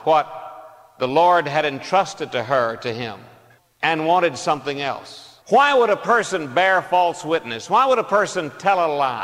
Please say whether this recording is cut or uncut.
cut